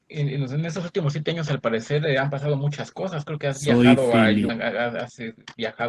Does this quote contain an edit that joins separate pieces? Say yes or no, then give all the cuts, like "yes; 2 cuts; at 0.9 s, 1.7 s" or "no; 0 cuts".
yes; 1 cut; at 4.5 s